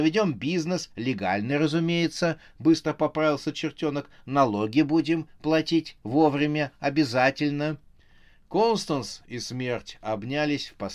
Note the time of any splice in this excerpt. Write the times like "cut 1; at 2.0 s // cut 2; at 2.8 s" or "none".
none